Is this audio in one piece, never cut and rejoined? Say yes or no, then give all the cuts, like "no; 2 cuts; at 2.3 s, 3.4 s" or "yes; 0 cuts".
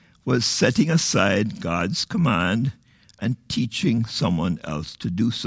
yes; 0 cuts